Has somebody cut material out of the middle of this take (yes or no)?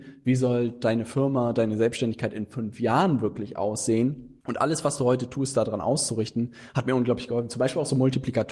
yes